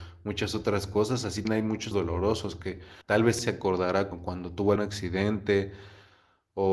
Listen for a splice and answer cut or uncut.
cut